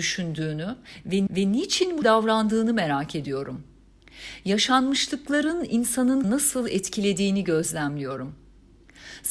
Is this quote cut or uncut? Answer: cut